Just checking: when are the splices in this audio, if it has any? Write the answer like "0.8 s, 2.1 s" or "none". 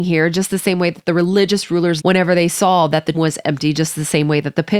2.0 s, 3.1 s